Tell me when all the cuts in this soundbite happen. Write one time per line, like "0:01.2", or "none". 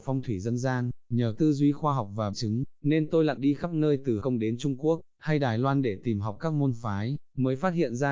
0:01.4
0:02.3
0:03.4
0:04.2